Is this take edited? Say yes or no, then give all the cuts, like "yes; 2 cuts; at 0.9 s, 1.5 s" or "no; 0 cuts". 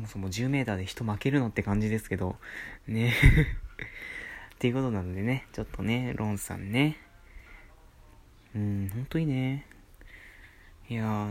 no; 0 cuts